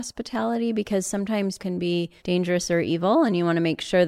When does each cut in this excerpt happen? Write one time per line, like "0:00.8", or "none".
0:01.6
0:02.2